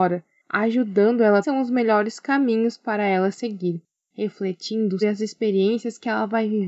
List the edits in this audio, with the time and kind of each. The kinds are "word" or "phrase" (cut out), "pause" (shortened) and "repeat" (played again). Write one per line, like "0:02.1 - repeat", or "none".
0:01.4 - phrase
0:05.0 - word